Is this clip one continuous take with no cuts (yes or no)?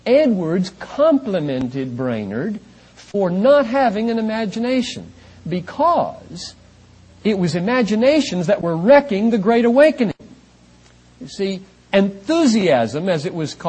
yes